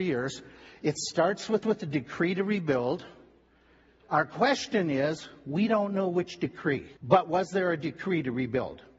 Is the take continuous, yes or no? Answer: no